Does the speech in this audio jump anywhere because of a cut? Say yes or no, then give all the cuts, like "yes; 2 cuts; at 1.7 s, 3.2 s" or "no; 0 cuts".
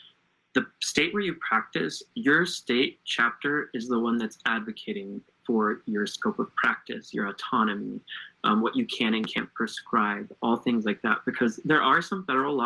no; 0 cuts